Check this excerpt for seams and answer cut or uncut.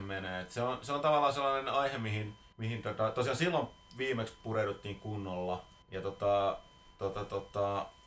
cut